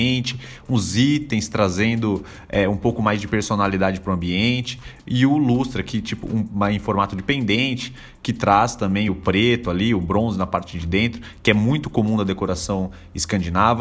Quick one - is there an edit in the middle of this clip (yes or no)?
no